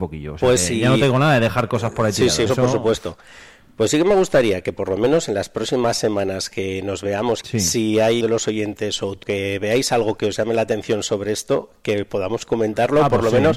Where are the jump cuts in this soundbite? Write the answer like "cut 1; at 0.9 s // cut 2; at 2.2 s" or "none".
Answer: cut 1; at 2.5 s // cut 2; at 7.4 s // cut 3; at 8.2 s // cut 4; at 9.2 s

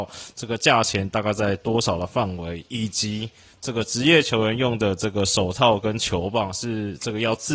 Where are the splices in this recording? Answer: none

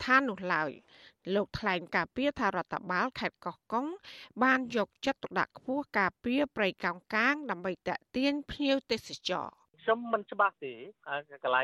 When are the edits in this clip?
cut 1; at 9.7 s

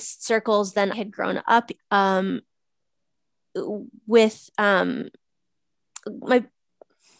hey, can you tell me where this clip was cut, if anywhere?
cut 1; at 0.9 s // cut 2; at 1.8 s

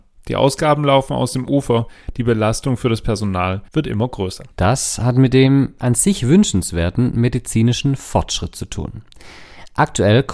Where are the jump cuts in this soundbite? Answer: cut 1; at 3.7 s // cut 2; at 4.5 s

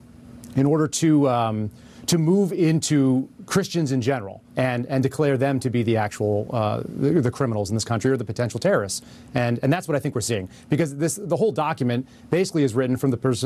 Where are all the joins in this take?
cut 1; at 4.5 s

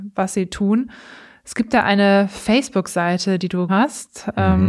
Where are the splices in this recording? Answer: cut 1; at 3.7 s

